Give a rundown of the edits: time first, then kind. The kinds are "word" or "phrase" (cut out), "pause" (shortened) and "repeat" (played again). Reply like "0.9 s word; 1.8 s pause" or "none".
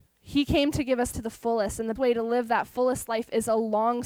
1.1 s word; 2.0 s word